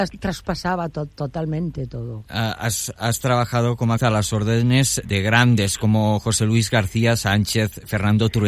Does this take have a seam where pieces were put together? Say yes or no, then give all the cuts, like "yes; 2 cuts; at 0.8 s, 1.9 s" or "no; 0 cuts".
yes; 2 cuts; at 4.0 s, 5.0 s